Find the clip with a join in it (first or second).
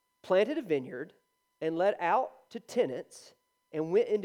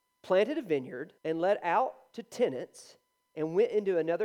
second